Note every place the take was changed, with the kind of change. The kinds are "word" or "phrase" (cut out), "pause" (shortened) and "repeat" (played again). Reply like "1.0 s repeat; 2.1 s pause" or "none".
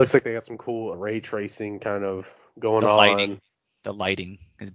0.9 s word

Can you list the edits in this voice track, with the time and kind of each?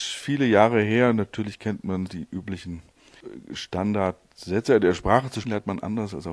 2.1 s word; 5.4 s word

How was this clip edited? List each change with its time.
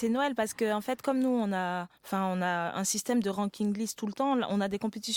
1.9 s pause

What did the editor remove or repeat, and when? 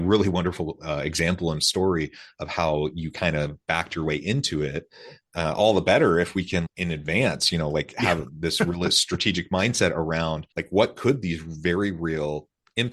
6.6 s word; 10.5 s pause

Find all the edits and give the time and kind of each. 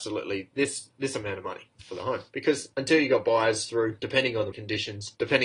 4.5 s word

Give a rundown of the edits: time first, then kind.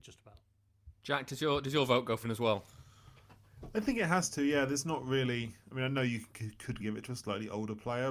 2.2 s word; 6.8 s word

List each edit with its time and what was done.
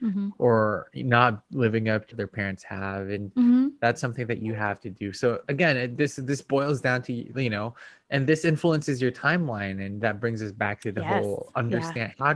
2.1 s phrase

